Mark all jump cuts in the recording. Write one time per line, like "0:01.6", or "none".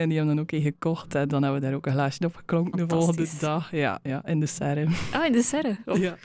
0:01.3